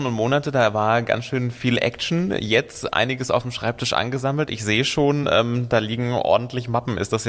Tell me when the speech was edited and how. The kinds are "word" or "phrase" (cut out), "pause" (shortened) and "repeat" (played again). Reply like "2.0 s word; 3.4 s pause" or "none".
none